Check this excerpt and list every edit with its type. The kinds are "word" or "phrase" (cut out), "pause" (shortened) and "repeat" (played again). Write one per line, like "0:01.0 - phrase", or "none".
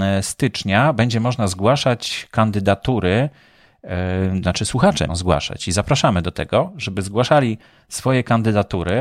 0:05.1 - word